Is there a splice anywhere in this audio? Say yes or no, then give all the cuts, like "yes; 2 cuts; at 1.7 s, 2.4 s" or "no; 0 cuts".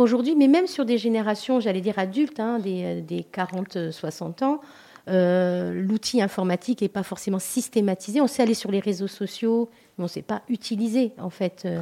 no; 0 cuts